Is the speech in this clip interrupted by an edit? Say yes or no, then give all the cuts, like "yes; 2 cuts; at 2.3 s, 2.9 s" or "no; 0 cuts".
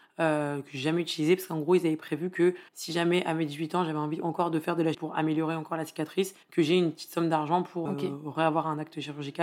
yes; 4 cuts; at 2.7 s, 4.9 s, 6.4 s, 7.9 s